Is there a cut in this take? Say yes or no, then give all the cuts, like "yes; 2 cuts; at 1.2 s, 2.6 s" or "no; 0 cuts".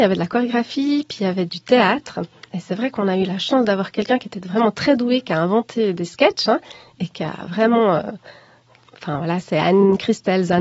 yes; 1 cut; at 1.5 s